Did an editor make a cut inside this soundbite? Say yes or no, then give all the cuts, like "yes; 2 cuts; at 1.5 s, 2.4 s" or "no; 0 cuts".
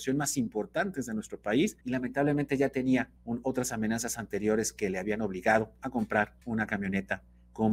yes; 3 cuts; at 1.8 s, 3.2 s, 6.4 s